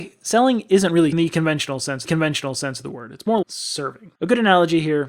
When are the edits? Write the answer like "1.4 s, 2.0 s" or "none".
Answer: 1.1 s, 2.0 s, 3.4 s, 4.1 s